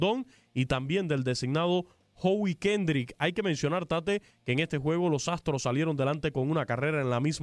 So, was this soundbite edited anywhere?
no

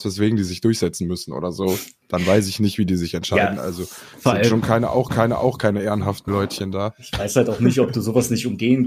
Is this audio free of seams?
no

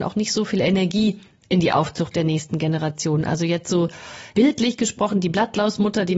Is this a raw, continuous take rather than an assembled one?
yes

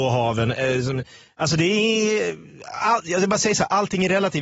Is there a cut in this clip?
no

